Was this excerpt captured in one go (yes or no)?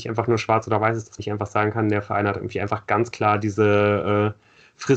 no